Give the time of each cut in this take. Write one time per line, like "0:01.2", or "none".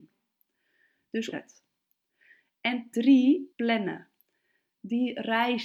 0:01.3
0:02.9
0:03.5